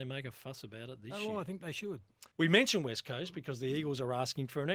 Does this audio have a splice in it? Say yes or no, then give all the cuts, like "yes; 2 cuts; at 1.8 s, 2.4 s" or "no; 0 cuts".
yes; 1 cut; at 2.3 s